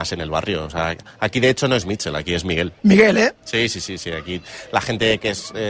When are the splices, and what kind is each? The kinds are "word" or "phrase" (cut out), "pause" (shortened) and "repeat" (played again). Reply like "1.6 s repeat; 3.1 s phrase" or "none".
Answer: 2.8 s pause